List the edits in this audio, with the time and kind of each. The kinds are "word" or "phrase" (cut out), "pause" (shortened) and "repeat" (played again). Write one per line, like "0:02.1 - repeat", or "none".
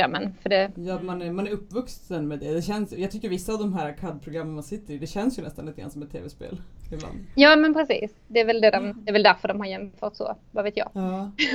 none